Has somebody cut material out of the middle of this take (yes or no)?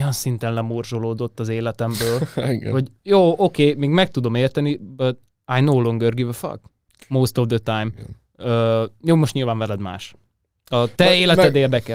yes